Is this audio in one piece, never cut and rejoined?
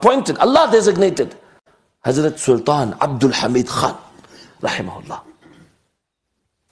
yes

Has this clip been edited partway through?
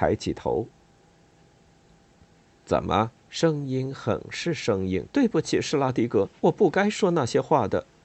yes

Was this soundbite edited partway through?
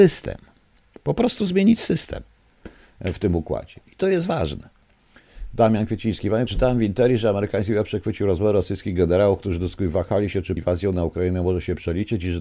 yes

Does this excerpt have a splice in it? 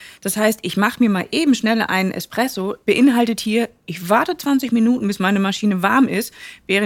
no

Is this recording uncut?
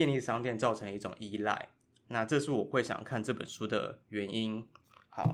yes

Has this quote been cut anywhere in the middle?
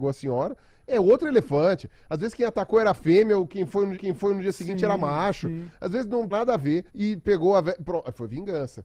yes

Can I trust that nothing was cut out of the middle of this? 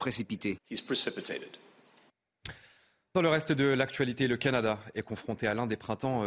yes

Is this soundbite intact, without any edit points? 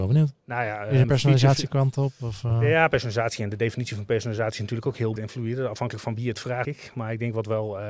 no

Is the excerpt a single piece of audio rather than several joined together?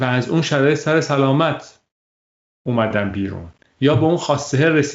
yes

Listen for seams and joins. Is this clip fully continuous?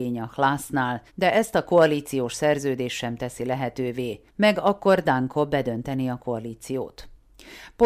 no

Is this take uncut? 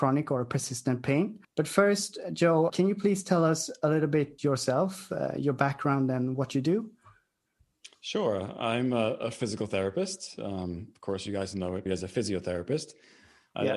no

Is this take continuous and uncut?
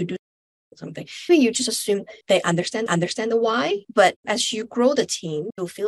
no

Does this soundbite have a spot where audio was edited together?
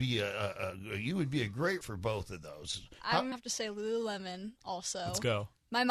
yes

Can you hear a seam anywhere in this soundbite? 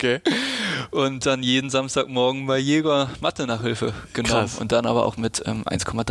no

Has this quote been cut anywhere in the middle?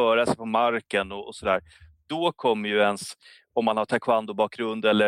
no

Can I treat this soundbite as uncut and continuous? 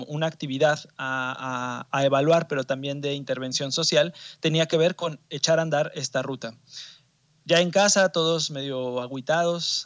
yes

